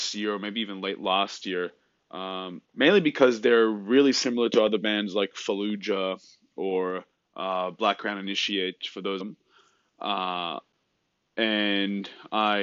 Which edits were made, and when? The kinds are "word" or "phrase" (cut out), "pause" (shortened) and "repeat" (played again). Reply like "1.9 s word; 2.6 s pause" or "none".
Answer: 2.6 s pause; 7.1 s pause; 9.2 s phrase